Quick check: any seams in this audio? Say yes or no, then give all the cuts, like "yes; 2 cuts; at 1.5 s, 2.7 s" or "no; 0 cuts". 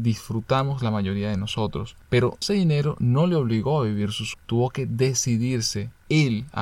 yes; 2 cuts; at 2.4 s, 4.3 s